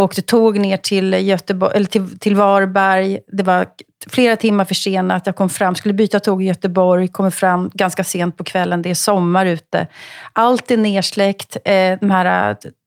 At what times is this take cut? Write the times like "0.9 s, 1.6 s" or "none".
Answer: none